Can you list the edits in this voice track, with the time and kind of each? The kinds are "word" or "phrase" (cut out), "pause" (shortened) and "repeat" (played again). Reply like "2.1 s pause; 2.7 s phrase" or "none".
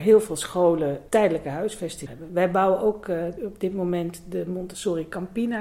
1.1 s word; 2.1 s word; 3.4 s word